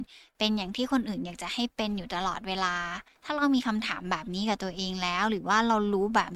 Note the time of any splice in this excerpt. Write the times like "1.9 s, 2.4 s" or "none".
3.1 s